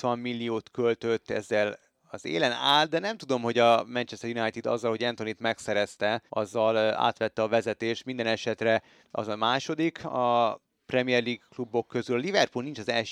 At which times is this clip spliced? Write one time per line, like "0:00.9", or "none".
0:06.3

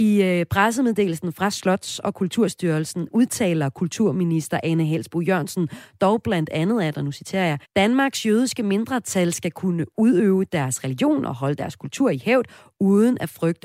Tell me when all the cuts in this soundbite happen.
0:07.6

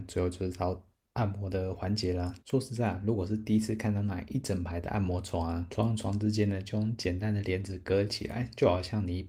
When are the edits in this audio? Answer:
0:02.4

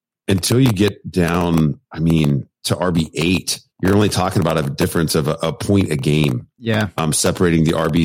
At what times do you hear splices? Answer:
0:01.8
0:03.7

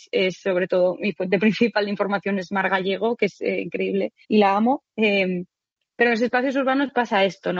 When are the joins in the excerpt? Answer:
0:04.2

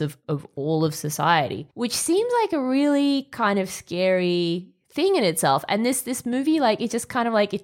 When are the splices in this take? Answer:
0:01.7

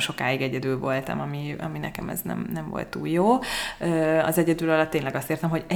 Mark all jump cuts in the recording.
none

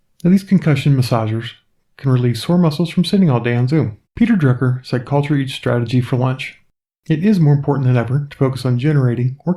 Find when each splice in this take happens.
0:04.0

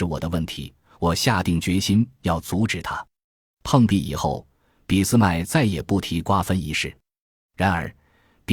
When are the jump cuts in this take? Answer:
none

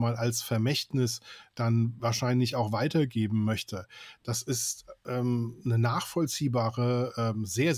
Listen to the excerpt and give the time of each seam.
none

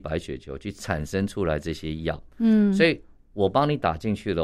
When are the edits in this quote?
none

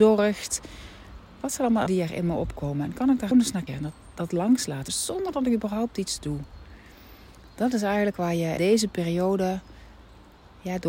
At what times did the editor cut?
0:01.9
0:03.3
0:03.7
0:04.9
0:08.6

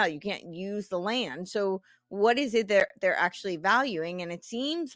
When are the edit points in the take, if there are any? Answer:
none

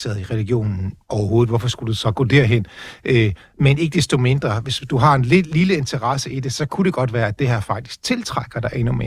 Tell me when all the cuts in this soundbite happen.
0:01.0

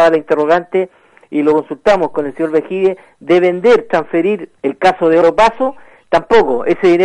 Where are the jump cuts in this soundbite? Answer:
0:04.6
0:05.2

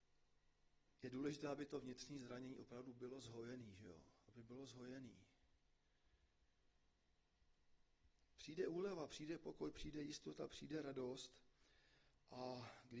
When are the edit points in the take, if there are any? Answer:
none

